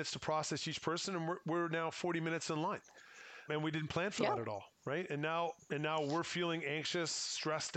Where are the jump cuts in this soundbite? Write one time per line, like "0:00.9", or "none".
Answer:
0:03.5